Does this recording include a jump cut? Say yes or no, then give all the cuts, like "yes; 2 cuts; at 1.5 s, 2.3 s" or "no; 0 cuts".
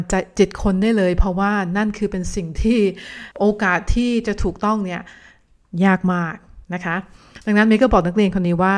yes; 2 cuts; at 3.3 s, 6.6 s